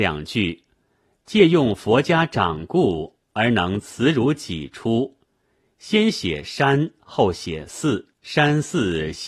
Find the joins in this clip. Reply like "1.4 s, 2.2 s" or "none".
8.1 s